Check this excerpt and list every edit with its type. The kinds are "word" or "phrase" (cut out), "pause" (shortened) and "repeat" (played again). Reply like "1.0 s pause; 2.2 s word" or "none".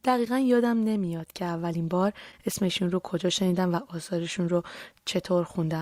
none